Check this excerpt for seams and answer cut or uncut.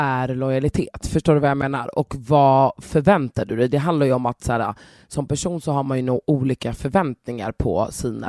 uncut